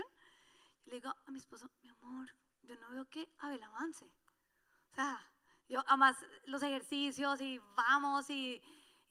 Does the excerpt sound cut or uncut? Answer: uncut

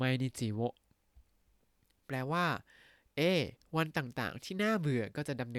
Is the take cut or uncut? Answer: uncut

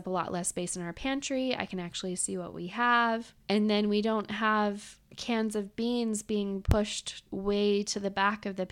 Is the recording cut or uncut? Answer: cut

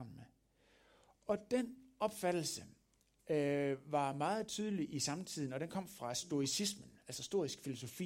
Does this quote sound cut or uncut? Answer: uncut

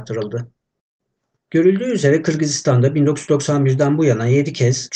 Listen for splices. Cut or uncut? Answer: uncut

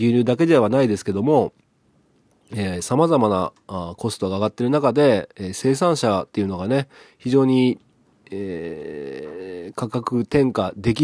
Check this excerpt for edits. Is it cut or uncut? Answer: uncut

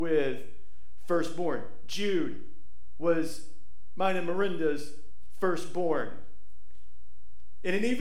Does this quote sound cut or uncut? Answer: uncut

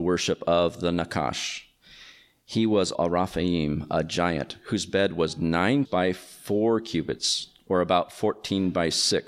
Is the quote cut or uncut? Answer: cut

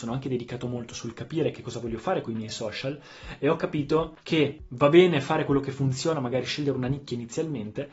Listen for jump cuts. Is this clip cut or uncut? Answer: uncut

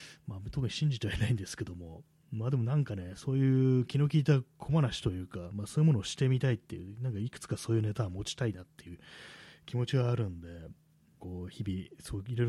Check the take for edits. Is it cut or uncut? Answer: cut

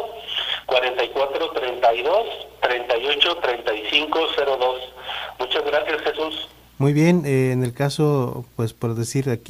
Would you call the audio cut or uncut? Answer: uncut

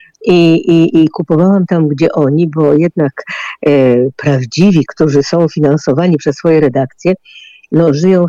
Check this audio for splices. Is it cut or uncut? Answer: cut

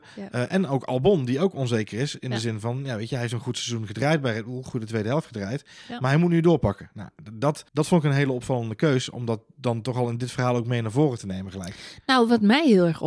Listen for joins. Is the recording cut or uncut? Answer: cut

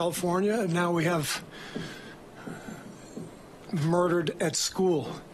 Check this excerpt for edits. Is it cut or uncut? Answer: cut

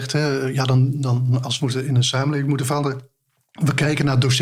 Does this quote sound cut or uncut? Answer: cut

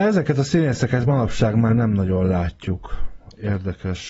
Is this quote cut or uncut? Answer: uncut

